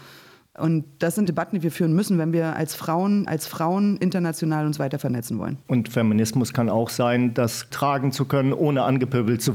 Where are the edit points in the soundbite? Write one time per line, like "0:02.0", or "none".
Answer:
0:01.3
0:03.3
0:05.6
0:07.7